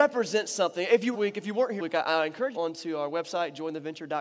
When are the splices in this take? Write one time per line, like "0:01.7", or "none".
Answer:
0:01.1
0:01.8
0:02.5